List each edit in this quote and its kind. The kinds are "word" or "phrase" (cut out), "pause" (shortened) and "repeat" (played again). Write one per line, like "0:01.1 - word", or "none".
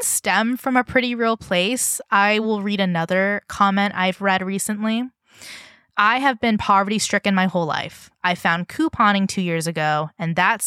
none